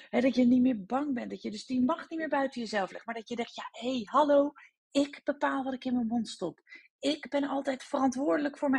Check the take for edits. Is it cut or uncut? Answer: uncut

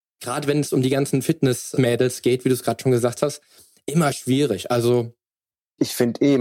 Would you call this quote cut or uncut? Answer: uncut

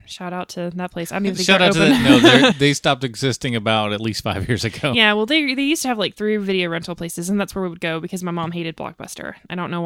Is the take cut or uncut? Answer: cut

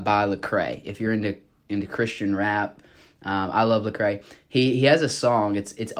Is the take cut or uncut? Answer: uncut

